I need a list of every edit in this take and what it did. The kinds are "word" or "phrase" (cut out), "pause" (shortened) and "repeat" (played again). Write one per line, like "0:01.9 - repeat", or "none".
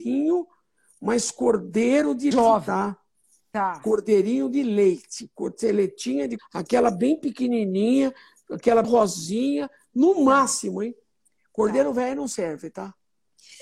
0:02.3 - word
0:06.4 - word
0:08.8 - word